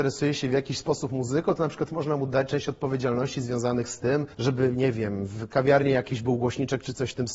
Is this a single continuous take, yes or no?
no